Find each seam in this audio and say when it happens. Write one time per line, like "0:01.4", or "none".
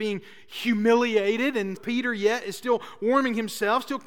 0:01.8